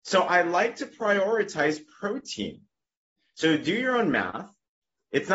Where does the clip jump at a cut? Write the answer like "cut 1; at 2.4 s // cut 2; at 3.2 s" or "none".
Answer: none

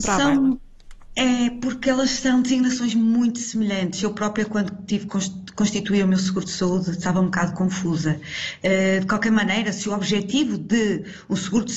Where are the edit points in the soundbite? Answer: none

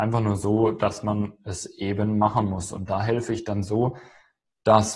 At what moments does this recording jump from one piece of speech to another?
none

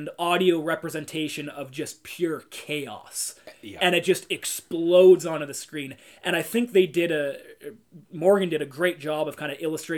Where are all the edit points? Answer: none

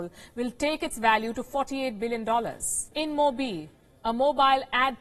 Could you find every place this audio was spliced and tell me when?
cut 1; at 2.9 s

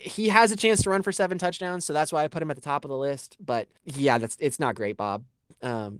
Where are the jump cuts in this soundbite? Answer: cut 1; at 3.8 s

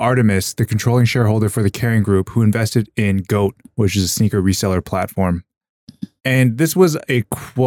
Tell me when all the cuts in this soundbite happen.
cut 1; at 6.2 s

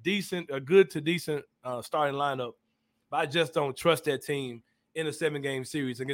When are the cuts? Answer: none

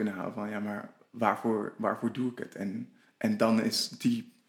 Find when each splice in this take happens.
none

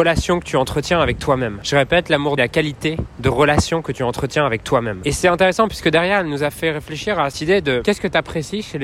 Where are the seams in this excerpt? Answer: cut 1; at 2.4 s // cut 2; at 7.3 s

